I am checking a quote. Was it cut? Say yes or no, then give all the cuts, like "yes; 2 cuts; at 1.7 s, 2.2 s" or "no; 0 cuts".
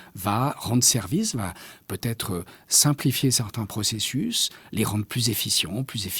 no; 0 cuts